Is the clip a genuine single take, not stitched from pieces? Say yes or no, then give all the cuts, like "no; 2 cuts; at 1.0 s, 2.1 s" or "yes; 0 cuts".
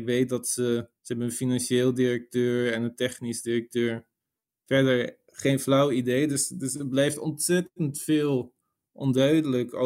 no; 1 cut; at 1.0 s